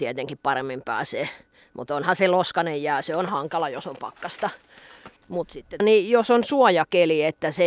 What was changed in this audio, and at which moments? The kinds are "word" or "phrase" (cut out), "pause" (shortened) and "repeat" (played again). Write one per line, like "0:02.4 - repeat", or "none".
0:05.2 - pause
0:05.8 - word